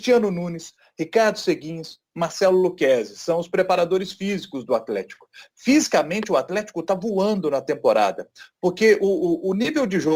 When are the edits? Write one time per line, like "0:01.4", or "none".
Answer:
none